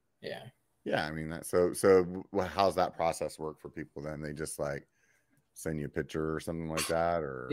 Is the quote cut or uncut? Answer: uncut